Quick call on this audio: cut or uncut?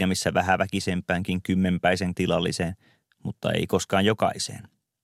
cut